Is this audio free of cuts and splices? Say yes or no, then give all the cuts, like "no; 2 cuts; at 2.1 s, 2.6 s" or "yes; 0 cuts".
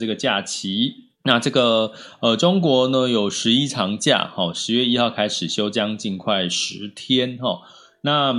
no; 1 cut; at 1.1 s